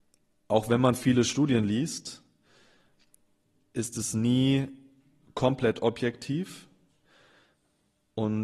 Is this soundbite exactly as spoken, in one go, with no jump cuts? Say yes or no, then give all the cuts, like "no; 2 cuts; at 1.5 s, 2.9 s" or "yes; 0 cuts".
yes; 0 cuts